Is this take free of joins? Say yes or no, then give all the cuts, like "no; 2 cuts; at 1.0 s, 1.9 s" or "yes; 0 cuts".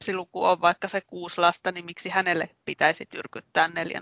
yes; 0 cuts